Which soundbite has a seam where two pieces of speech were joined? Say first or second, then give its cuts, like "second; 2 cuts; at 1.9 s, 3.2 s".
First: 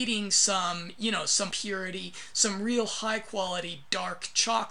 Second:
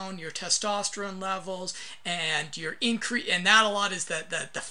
first; 1 cut; at 1.5 s